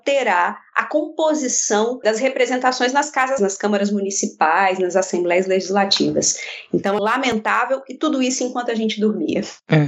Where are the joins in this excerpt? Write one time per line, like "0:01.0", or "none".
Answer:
0:02.0
0:03.4
0:07.0